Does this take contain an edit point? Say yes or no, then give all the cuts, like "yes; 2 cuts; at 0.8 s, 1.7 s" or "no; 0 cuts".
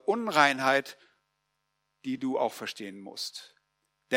no; 0 cuts